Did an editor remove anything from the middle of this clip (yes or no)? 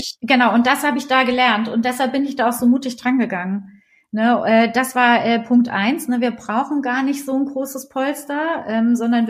no